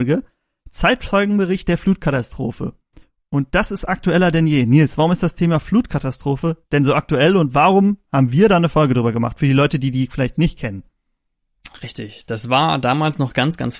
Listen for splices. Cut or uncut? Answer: uncut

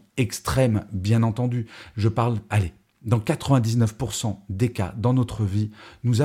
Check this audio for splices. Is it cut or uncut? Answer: uncut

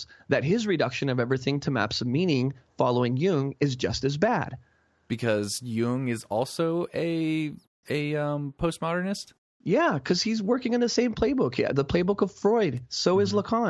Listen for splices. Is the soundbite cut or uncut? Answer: uncut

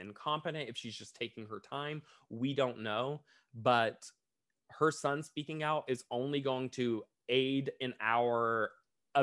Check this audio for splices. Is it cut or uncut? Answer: uncut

